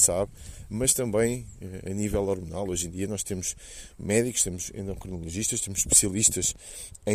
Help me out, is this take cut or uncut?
uncut